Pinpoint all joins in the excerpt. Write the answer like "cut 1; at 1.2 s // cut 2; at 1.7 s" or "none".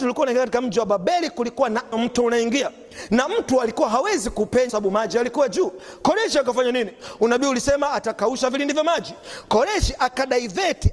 cut 1; at 1.9 s // cut 2; at 4.7 s

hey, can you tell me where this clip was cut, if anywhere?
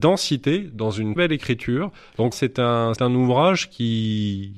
cut 1; at 1.2 s // cut 2; at 2.3 s // cut 3; at 3.0 s

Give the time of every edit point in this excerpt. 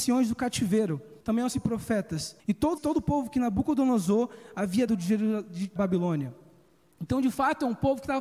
cut 1; at 1.2 s // cut 2; at 1.5 s // cut 3; at 2.4 s // cut 4; at 2.8 s // cut 5; at 4.9 s // cut 6; at 5.8 s

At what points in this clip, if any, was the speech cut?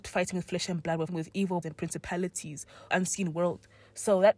cut 1; at 1.1 s // cut 2; at 1.6 s // cut 3; at 2.9 s

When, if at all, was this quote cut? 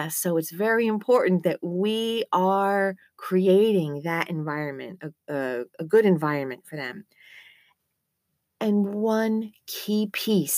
none

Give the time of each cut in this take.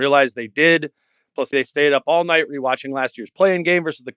cut 1; at 1.5 s

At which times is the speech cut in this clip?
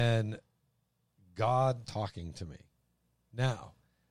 cut 1; at 1.8 s

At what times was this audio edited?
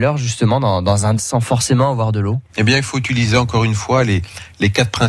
cut 1; at 1.2 s // cut 2; at 2.5 s

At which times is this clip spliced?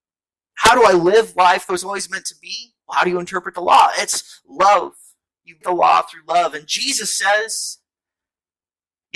cut 1; at 1.7 s // cut 2; at 2.8 s // cut 3; at 5.6 s

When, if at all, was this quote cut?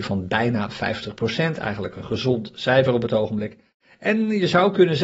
none

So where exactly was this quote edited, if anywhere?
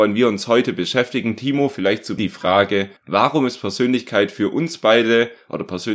cut 1; at 2.2 s // cut 2; at 3.0 s

